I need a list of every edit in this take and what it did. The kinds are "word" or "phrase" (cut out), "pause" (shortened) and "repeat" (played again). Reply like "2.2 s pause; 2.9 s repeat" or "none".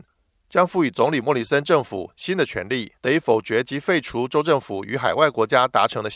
3.0 s pause